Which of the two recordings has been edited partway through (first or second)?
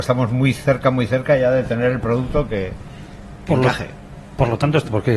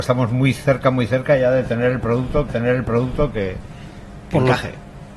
second